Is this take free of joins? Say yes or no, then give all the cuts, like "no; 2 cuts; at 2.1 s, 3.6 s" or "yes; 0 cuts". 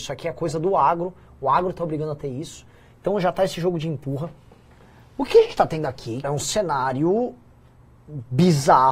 no; 1 cut; at 6.2 s